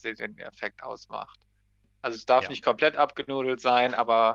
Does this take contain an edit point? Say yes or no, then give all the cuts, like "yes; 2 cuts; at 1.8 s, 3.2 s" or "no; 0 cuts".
no; 0 cuts